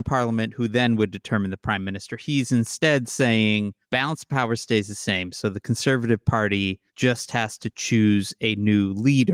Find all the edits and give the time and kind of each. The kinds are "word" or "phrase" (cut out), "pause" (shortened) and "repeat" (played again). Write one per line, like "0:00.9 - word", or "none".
0:03.8 - pause
0:06.9 - pause